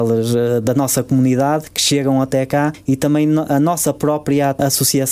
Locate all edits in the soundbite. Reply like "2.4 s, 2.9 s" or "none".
none